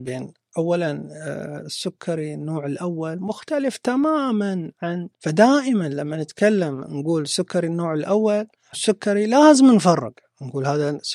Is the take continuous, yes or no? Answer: no